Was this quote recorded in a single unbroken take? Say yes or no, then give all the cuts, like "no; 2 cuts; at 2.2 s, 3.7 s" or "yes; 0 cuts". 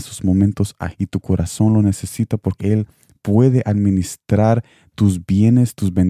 no; 2 cuts; at 0.9 s, 2.6 s